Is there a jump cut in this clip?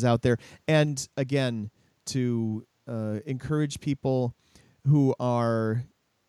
no; 0 cuts

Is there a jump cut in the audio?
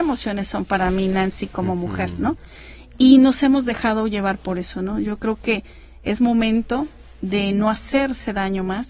no; 0 cuts

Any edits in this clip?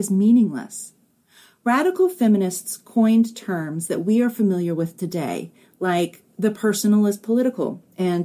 no; 0 cuts

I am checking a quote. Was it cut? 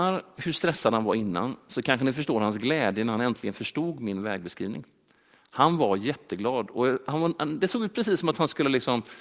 no; 0 cuts

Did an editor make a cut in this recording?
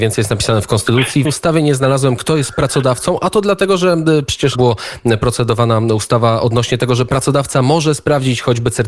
yes; 2 cuts; at 1.2 s, 4.5 s

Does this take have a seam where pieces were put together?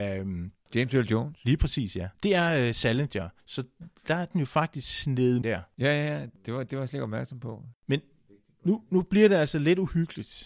yes; 4 cuts; at 2.1 s, 3.4 s, 4.3 s, 5.4 s

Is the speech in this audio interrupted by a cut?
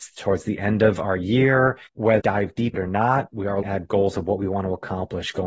yes; 3 cuts; at 2.2 s, 2.7 s, 3.6 s

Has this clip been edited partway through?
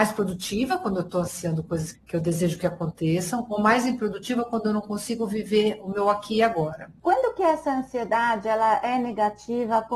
yes; 1 cut; at 1.9 s

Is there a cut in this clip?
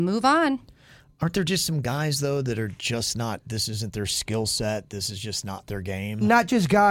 no; 0 cuts

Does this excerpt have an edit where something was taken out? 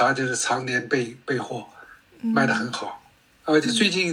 no; 0 cuts

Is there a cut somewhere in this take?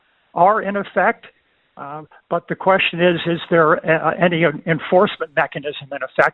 no; 0 cuts

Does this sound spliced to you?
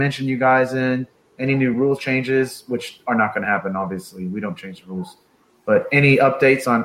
no; 0 cuts

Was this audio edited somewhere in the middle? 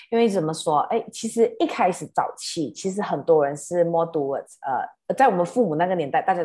yes; 1 cut; at 5.0 s

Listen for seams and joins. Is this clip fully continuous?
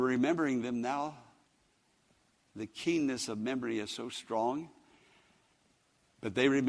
yes; 0 cuts

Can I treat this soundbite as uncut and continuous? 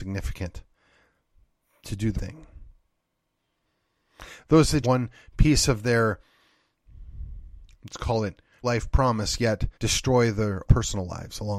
no; 6 cuts; at 2.2 s, 4.8 s, 7.7 s, 8.6 s, 9.7 s, 10.7 s

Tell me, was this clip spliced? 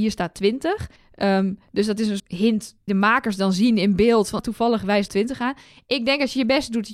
yes; 5 cuts; at 1.0 s, 2.2 s, 2.9 s, 4.4 s, 5.1 s

